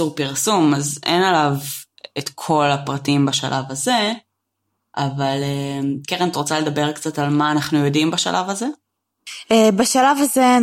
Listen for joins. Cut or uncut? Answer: uncut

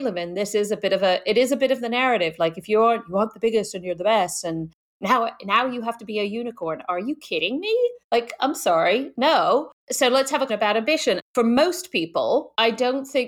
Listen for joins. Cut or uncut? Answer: cut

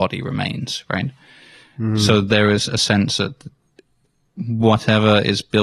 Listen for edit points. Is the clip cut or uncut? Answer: uncut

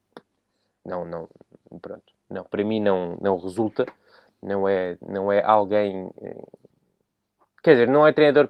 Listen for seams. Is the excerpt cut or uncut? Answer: uncut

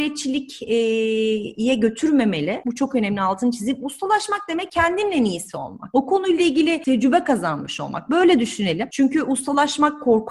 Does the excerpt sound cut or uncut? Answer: uncut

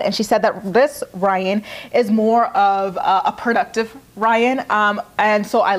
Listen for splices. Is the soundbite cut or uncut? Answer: uncut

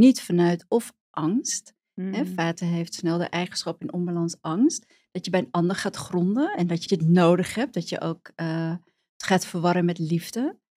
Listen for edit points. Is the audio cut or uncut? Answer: cut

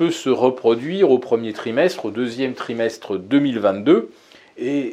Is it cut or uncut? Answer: uncut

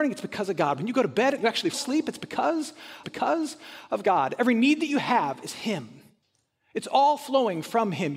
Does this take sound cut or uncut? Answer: cut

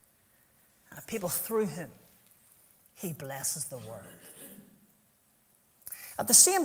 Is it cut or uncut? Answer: uncut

